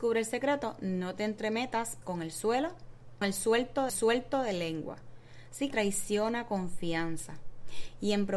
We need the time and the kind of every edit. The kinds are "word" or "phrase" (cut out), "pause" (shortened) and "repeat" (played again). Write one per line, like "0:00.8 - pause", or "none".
0:02.0 - word
0:03.2 - word
0:03.9 - repeat
0:05.7 - phrase